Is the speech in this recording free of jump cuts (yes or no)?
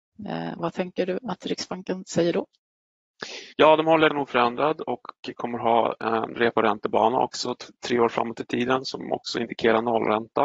no